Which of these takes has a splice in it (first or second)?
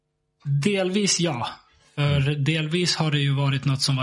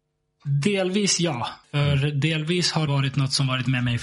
second